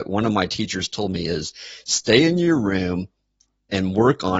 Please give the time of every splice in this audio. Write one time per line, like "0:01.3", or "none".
none